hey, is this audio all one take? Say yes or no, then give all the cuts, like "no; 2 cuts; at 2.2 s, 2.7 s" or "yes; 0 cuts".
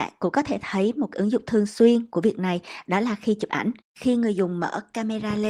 yes; 0 cuts